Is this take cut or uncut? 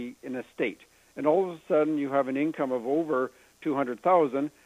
uncut